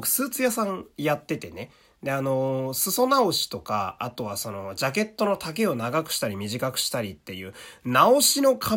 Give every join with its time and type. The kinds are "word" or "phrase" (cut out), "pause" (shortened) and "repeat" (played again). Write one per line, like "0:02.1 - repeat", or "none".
none

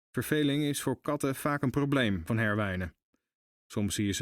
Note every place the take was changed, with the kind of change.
0:02.3 - word

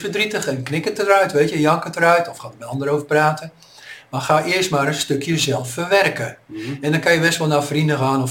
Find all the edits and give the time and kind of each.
0:06.4 - pause

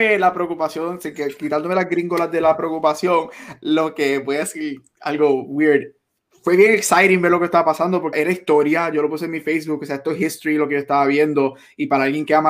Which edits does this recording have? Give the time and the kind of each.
0:08.1 - word

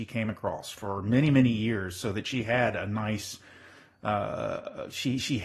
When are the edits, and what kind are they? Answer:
none

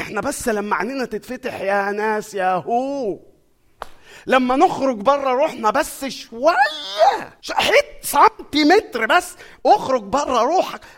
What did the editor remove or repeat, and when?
0:07.4 - pause

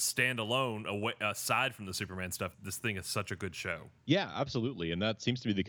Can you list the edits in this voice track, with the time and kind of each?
0:02.5 - word
0:04.0 - pause

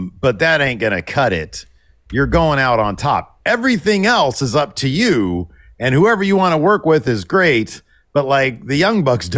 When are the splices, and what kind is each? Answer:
none

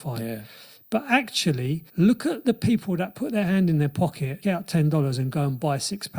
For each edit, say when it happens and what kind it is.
0:01.9 - pause
0:04.4 - word

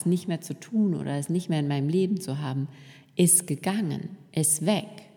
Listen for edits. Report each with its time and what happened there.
none

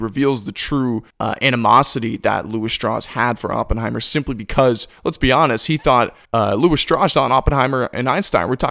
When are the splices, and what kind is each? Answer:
0:01.1 - pause
0:06.2 - pause
0:07.1 - word

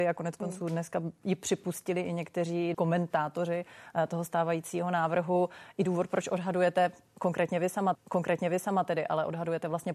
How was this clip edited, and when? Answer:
0:02.7 - word
0:07.9 - repeat

